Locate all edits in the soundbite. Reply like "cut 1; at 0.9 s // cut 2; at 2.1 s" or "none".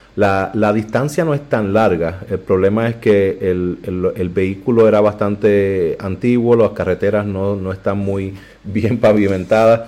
none